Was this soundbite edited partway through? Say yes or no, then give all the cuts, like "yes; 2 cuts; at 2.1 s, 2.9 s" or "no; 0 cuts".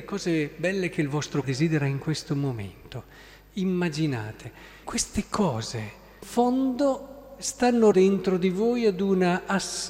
yes; 4 cuts; at 1.4 s, 4.8 s, 6.2 s, 7.9 s